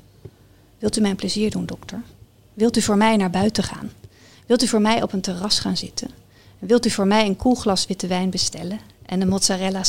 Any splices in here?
no; 0 cuts

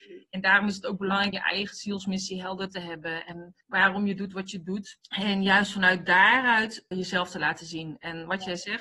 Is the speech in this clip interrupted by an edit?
yes; 4 cuts; at 1.3 s, 3.6 s, 5.0 s, 6.9 s

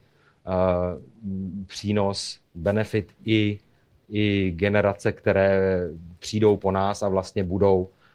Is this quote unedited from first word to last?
yes; 0 cuts

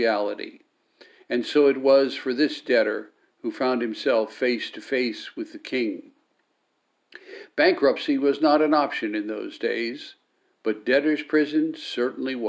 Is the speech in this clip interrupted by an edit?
no; 0 cuts

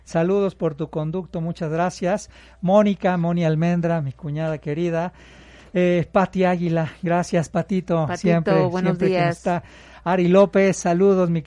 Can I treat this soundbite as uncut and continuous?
yes; 0 cuts

